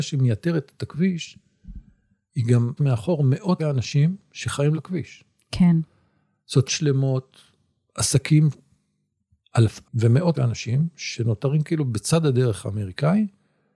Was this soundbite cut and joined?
yes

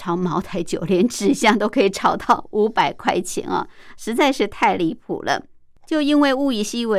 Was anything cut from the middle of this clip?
no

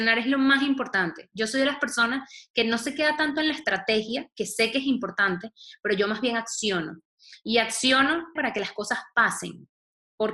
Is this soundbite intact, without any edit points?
no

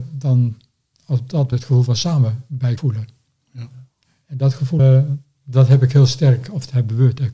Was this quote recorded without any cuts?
no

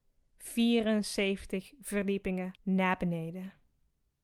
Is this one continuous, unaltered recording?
no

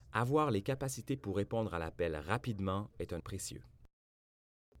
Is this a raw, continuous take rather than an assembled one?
no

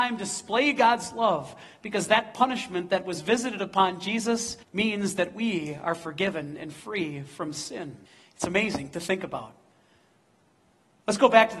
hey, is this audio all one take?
no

